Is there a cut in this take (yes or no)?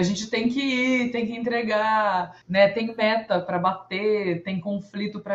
yes